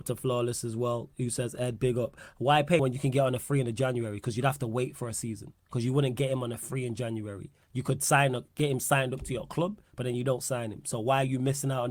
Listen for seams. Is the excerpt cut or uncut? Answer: cut